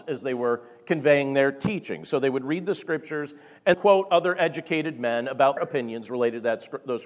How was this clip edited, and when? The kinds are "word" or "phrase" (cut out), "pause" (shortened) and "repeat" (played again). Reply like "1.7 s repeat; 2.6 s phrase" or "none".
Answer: 3.7 s word; 5.6 s word